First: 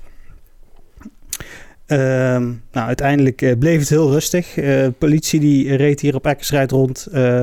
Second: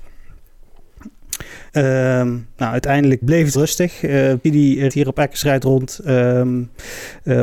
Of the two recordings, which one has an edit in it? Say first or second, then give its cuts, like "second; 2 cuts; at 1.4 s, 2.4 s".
second; 5 cuts; at 1.7 s, 3.2 s, 3.5 s, 4.4 s, 4.9 s